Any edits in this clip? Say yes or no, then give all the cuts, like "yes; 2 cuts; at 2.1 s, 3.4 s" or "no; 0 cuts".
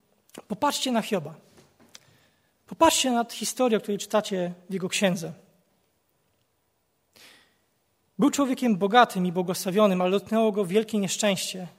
no; 0 cuts